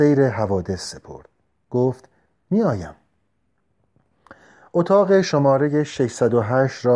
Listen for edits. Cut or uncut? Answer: uncut